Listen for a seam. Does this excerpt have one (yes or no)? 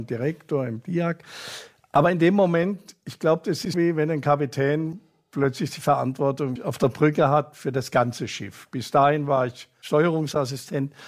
yes